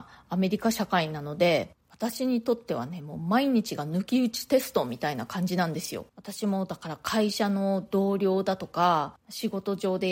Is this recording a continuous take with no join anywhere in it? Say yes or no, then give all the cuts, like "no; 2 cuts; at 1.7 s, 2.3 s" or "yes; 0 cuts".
no; 3 cuts; at 1.8 s, 6.1 s, 9.2 s